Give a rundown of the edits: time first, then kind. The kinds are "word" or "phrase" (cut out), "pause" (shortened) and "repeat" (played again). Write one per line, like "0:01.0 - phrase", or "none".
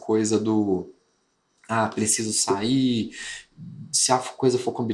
none